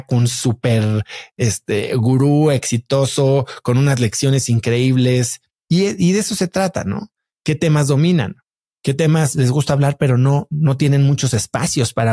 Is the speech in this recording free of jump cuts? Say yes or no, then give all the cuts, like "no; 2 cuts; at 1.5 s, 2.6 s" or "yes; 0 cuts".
yes; 0 cuts